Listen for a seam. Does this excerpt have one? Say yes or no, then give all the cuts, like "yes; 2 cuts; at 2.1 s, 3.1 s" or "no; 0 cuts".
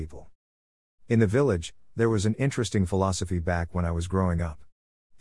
no; 0 cuts